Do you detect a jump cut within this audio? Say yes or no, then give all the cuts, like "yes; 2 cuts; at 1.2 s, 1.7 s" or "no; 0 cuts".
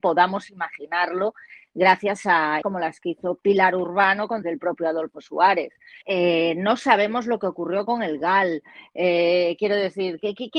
yes; 3 cuts; at 2.6 s, 4.4 s, 6.0 s